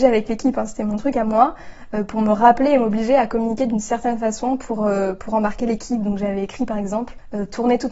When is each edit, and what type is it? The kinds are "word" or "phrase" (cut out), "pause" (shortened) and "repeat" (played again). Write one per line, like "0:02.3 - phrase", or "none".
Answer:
none